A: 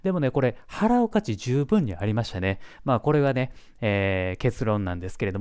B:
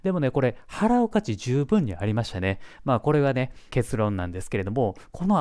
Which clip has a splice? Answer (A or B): B